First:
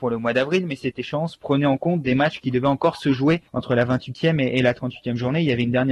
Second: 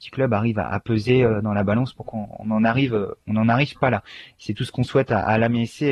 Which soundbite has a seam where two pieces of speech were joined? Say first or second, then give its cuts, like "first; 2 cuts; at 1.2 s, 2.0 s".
first; 1 cut; at 3.5 s